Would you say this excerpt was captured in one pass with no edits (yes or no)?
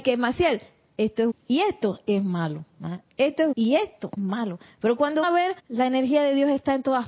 no